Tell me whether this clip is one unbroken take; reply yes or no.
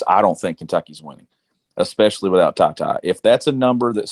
yes